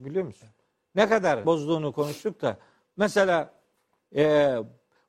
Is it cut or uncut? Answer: cut